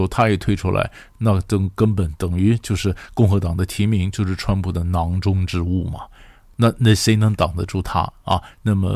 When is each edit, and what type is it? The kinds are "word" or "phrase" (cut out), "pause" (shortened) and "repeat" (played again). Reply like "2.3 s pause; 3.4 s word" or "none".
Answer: none